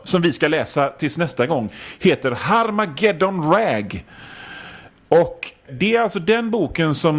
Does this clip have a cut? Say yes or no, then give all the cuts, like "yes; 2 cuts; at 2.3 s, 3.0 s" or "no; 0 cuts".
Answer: yes; 1 cut; at 5.7 s